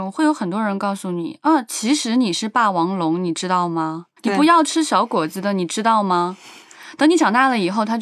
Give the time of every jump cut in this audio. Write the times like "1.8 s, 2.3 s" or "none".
4.2 s